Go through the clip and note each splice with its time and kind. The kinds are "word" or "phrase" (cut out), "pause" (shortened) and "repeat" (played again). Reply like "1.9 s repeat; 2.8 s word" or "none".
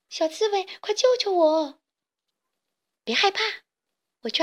none